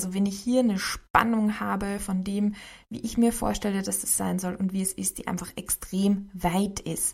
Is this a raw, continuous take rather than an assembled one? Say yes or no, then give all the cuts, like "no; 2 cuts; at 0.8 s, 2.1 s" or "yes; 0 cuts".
yes; 0 cuts